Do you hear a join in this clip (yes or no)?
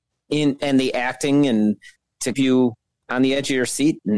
yes